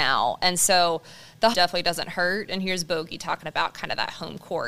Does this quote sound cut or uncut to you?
cut